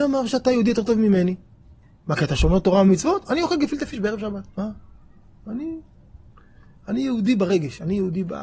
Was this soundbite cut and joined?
yes; 1 cut; at 4.5 s

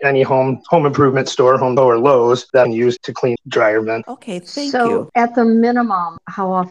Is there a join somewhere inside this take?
yes; 4 cuts; at 1.8 s, 2.6 s, 3.0 s, 3.4 s

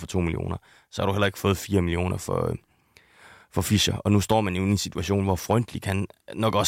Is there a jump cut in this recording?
no; 0 cuts

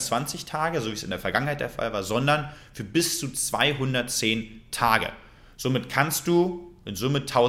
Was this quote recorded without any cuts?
yes; 0 cuts

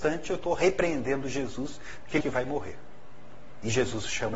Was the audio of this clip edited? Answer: yes; 1 cut; at 2.2 s

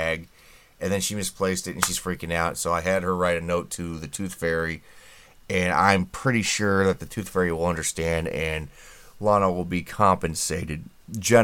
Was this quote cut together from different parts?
no; 0 cuts

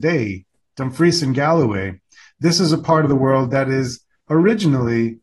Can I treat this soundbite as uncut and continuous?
yes; 0 cuts

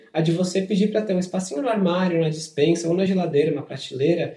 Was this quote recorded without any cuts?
yes; 0 cuts

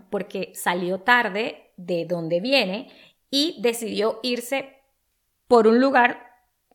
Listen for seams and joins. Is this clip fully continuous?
yes; 0 cuts

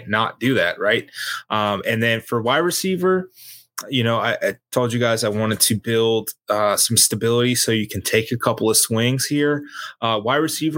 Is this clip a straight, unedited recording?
yes; 0 cuts

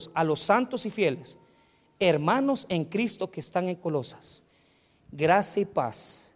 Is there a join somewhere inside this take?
no; 0 cuts

